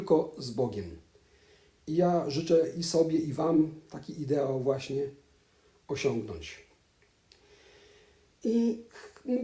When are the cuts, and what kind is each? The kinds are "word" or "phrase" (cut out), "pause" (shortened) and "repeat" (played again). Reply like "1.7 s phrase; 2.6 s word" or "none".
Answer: none